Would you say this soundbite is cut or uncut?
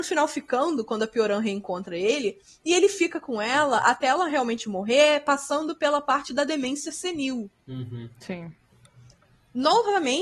uncut